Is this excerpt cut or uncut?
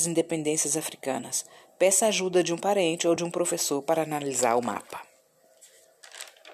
uncut